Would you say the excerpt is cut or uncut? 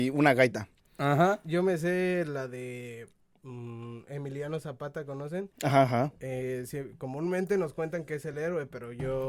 uncut